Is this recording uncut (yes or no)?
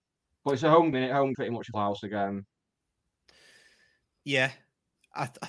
no